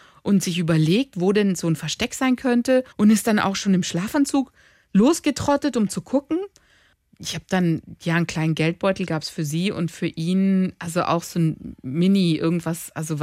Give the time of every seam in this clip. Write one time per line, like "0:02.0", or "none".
0:02.9